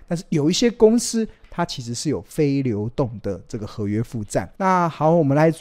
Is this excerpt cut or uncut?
cut